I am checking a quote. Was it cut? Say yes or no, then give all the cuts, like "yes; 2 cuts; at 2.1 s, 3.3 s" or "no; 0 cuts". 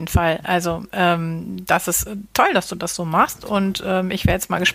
no; 0 cuts